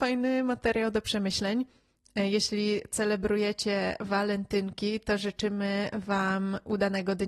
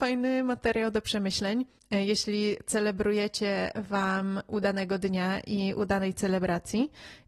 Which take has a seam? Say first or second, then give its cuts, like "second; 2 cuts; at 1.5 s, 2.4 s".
second; 2 cuts; at 1.8 s, 3.7 s